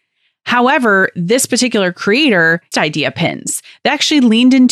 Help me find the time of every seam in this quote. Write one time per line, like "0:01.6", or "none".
0:02.7